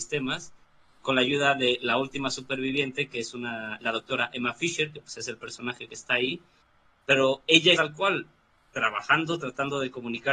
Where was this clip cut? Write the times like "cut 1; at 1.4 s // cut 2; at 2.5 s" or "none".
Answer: cut 1; at 3.8 s // cut 2; at 5.9 s // cut 3; at 7.7 s